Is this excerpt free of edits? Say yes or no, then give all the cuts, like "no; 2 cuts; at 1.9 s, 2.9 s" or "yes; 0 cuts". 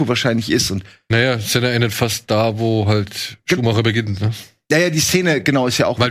yes; 0 cuts